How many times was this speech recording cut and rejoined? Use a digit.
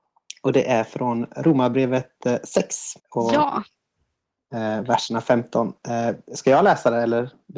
1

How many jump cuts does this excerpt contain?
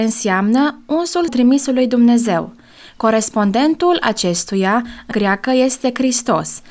2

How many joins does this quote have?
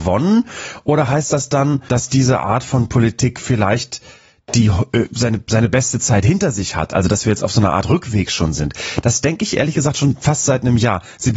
0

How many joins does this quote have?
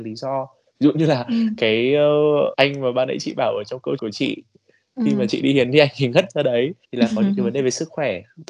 3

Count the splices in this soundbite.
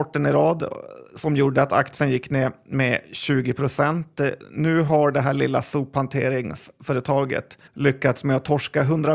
1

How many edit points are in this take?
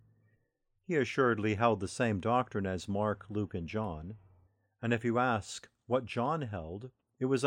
0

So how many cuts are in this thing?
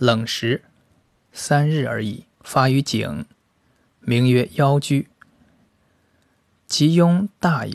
1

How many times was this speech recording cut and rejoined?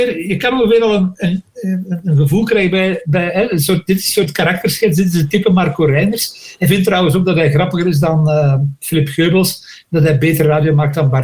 0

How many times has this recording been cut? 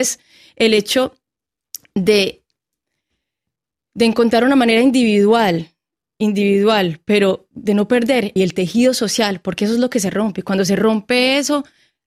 1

